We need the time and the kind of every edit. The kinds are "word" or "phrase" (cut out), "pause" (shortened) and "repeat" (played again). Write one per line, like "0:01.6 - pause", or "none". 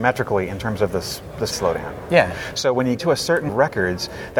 0:01.5 - word
0:03.0 - word
0:03.5 - word

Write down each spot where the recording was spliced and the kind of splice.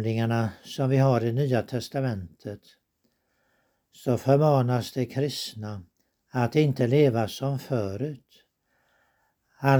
none

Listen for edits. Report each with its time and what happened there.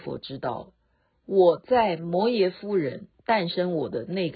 0:03.1 - pause

